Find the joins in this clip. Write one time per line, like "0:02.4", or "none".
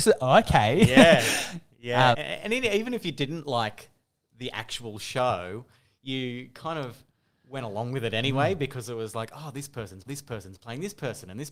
0:02.1
0:10.1

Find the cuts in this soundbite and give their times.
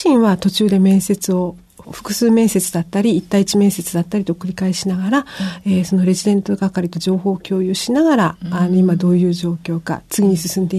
none

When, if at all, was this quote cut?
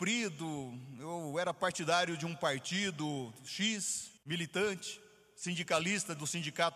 0:04.2

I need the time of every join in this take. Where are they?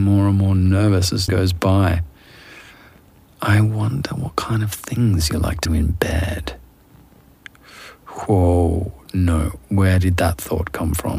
0:01.3
0:05.7

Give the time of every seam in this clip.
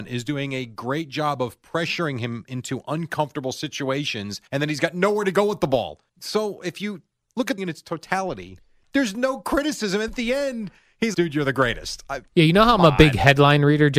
0:04.5
0:06.1
0:07.1
0:07.6
0:10.1
0:11.1
0:12.3

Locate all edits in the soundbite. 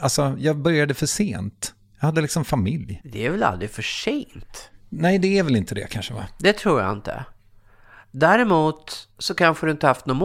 none

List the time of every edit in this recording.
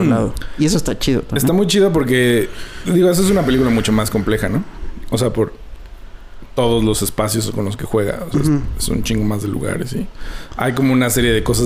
none

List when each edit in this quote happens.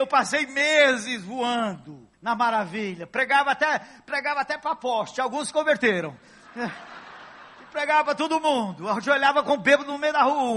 0:02.1

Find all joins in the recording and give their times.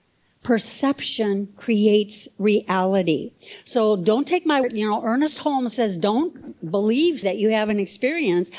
0:04.6
0:05.7
0:07.2

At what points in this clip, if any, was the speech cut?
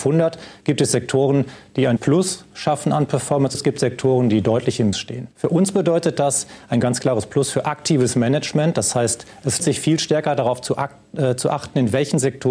0:02.0
0:03.5
0:04.9
0:05.3
0:09.6

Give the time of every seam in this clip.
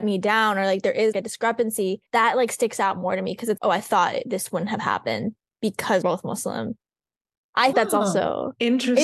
0:01.1
0:02.1
0:03.6
0:06.0
0:07.7

